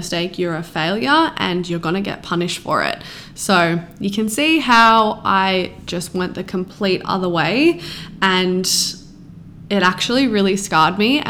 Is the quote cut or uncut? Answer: uncut